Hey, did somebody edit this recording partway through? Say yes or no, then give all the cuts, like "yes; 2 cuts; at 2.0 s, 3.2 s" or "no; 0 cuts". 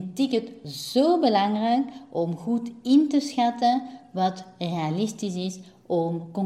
no; 0 cuts